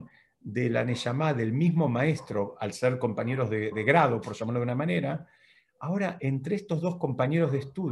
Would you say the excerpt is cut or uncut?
cut